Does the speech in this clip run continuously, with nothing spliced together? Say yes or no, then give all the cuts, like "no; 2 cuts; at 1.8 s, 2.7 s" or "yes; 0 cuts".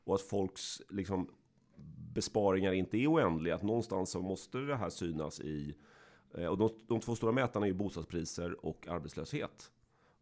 yes; 0 cuts